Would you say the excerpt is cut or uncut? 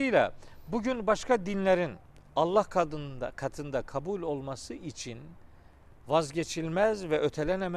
uncut